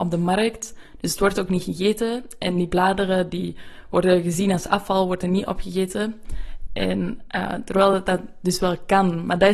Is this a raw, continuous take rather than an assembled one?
yes; 0 cuts

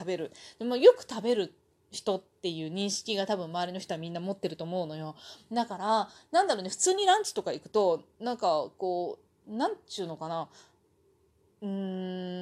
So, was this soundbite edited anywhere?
no; 0 cuts

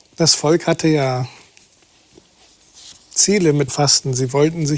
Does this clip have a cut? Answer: yes; 1 cut; at 3.7 s

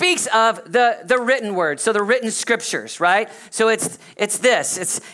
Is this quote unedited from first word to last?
yes; 0 cuts

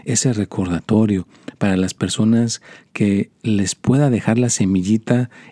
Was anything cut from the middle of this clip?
no; 0 cuts

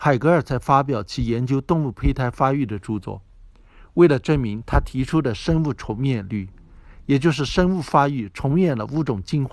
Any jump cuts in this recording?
no; 0 cuts

